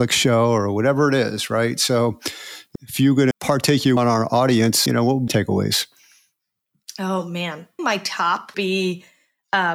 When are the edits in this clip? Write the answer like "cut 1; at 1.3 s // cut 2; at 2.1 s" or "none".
cut 1; at 2.8 s // cut 2; at 3.3 s // cut 3; at 4.0 s // cut 4; at 4.9 s // cut 5; at 5.3 s // cut 6; at 7.8 s // cut 7; at 8.5 s